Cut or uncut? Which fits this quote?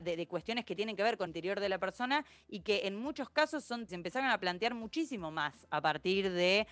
cut